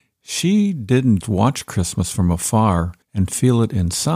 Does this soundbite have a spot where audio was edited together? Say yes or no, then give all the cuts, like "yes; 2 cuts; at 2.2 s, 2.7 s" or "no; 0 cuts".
yes; 2 cuts; at 1.2 s, 3.0 s